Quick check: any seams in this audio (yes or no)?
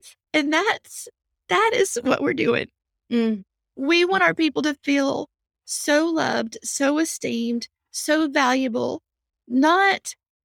no